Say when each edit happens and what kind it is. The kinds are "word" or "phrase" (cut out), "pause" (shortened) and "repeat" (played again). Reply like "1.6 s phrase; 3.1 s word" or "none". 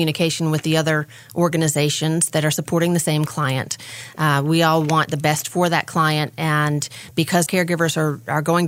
7.5 s word